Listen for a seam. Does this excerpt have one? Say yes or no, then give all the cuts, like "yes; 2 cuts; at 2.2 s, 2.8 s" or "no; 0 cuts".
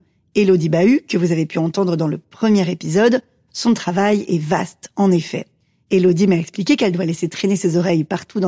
no; 0 cuts